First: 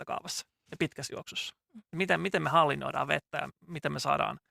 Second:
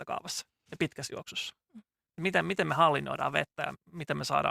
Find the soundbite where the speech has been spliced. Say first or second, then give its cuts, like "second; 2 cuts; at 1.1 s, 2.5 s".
first; 1 cut; at 1.9 s